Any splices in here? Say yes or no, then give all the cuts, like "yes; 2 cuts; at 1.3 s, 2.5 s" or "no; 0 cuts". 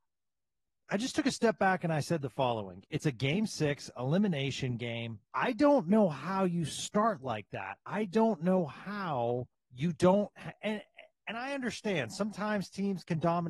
yes; 2 cuts; at 5.2 s, 9.5 s